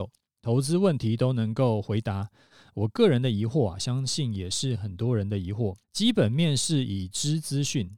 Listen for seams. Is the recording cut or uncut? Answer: cut